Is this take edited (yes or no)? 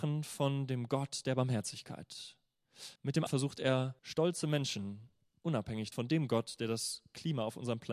yes